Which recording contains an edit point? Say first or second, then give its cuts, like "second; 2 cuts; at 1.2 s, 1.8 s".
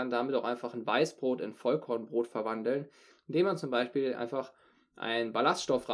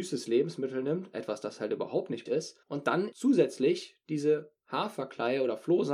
second; 3 cuts; at 2.3 s, 2.6 s, 3.1 s